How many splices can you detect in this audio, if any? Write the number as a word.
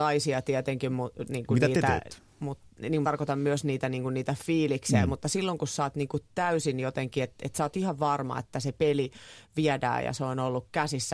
one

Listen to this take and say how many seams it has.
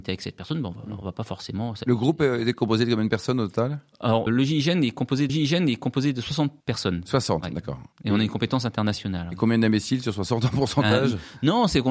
four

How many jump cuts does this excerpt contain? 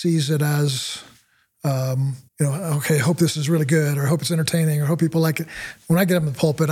one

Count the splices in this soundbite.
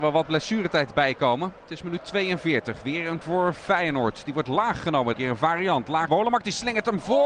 three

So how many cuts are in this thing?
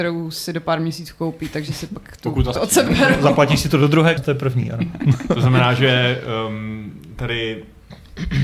three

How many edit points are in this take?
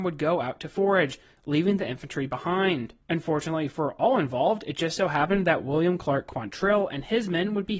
one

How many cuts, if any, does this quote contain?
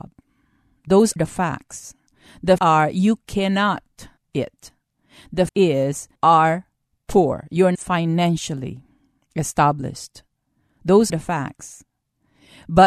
seven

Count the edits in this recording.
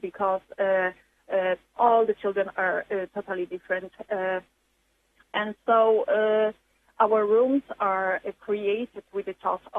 zero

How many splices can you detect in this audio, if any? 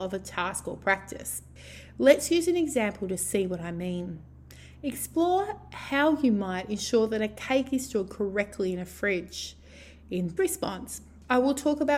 one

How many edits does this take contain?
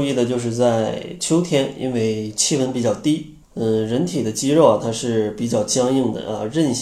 one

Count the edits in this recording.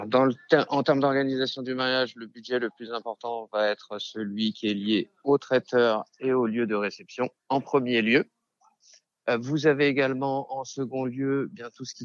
one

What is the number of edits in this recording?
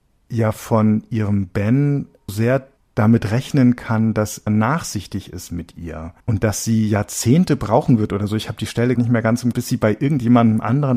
six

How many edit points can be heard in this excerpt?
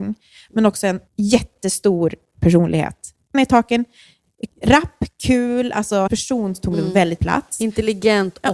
five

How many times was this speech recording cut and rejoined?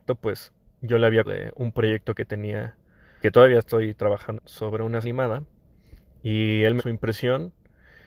five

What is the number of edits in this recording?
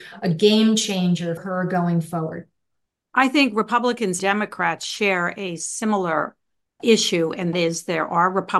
four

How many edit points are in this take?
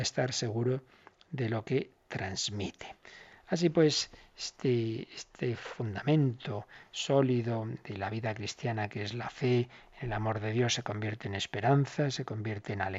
zero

